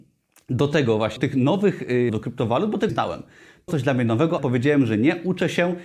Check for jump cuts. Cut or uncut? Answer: cut